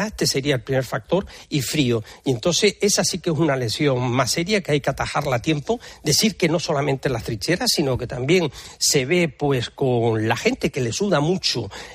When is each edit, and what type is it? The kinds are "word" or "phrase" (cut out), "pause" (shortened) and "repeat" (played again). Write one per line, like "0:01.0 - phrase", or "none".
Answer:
none

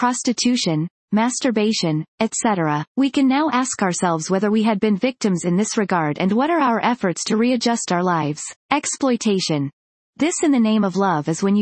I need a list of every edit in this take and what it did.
0:02.9 - pause
0:08.6 - pause

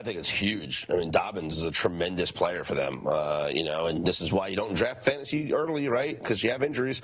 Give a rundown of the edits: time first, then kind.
none

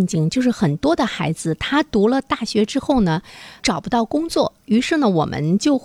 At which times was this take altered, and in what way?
0:03.6 - word

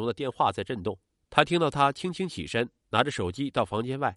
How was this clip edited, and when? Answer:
0:01.1 - pause

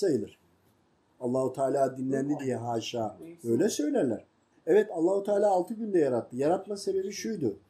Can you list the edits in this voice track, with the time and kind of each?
0:04.5 - pause

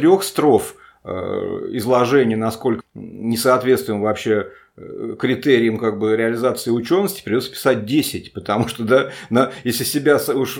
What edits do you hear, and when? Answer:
0:02.8 - word

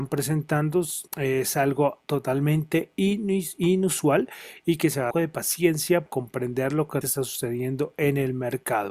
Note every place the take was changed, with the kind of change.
0:01.1 - pause
0:02.0 - pause
0:05.1 - phrase
0:06.1 - word
0:07.0 - word

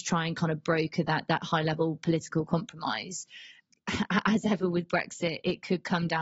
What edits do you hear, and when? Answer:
none

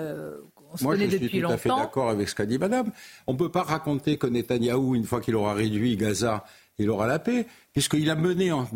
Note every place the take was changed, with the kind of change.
none

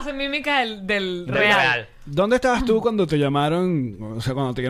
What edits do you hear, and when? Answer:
none

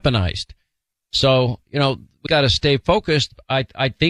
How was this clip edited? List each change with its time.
0:02.3 - word

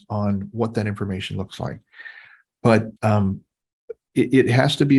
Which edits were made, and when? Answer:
0:03.0 - pause

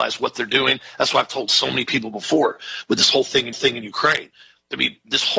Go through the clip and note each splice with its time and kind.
0:03.5 - repeat

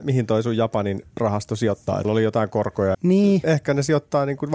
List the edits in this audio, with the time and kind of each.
0:02.0 - word
0:02.9 - word

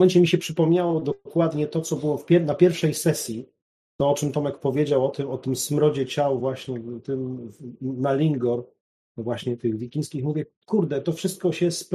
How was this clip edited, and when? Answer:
none

